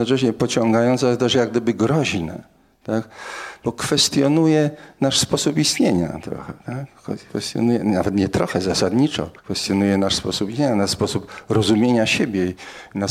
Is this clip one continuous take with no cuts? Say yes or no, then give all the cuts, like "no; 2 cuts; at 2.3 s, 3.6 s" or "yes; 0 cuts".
no; 1 cut; at 9.4 s